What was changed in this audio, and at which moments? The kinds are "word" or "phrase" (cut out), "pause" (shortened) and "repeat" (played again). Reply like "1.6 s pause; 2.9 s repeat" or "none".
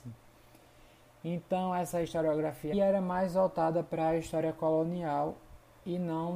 2.7 s phrase